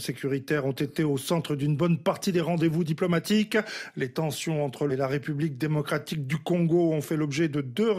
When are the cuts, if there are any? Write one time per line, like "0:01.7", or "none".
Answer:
0:04.9